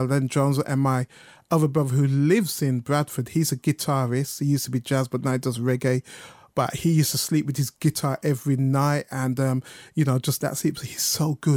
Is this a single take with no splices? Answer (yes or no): yes